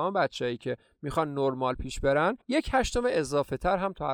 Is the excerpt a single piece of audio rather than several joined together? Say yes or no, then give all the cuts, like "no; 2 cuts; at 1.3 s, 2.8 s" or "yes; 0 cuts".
no; 1 cut; at 2.4 s